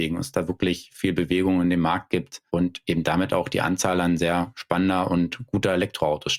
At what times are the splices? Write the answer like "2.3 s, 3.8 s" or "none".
2.5 s

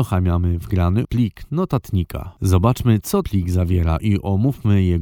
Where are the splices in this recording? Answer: 1.0 s, 3.2 s

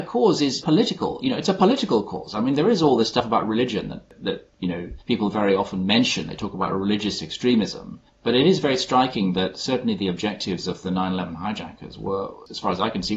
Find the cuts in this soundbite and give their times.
5.0 s, 8.1 s

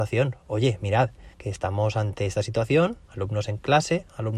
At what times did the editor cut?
1.3 s, 3.0 s

